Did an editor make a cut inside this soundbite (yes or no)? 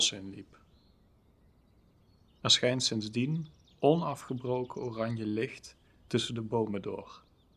no